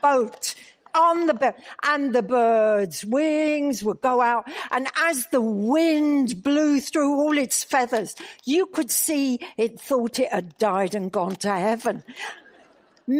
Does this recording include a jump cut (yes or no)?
no